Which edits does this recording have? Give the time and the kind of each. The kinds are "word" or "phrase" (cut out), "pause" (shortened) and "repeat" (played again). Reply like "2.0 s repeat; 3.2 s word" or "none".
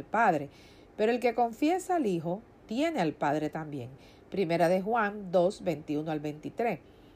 none